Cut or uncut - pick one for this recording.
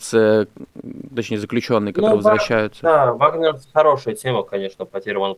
uncut